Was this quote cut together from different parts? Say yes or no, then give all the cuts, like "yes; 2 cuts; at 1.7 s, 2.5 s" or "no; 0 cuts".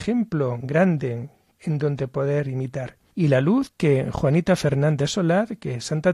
no; 0 cuts